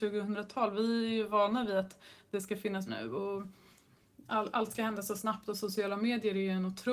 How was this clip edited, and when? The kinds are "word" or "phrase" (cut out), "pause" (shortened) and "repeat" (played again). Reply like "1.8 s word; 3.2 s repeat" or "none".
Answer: 2.9 s word